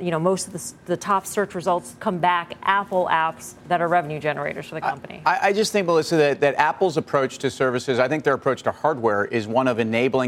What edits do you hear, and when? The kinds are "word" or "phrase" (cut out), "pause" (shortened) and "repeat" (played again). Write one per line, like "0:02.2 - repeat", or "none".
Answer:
0:03.6 - pause